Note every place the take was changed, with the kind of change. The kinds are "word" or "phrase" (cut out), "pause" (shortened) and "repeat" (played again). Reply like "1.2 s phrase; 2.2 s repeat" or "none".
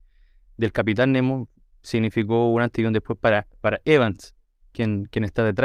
none